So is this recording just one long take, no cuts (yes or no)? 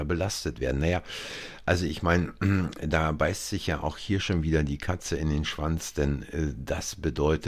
yes